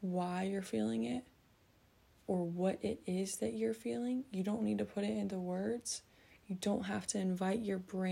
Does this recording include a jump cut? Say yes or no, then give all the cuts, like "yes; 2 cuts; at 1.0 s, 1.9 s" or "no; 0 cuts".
no; 0 cuts